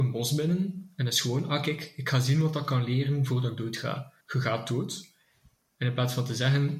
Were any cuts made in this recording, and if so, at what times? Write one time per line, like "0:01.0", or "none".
0:04.2